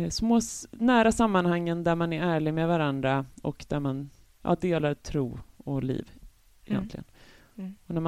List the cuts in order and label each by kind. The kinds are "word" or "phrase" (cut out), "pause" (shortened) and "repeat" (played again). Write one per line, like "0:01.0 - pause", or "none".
none